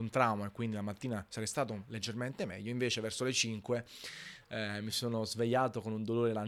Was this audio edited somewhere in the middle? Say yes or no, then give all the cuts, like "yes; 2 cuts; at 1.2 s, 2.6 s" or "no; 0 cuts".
no; 0 cuts